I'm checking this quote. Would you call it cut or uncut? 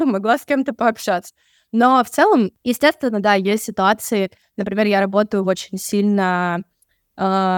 uncut